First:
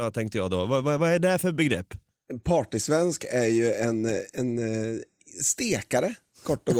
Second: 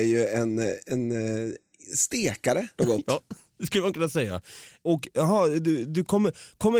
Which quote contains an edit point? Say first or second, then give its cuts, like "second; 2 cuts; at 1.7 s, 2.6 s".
second; 1 cut; at 2.8 s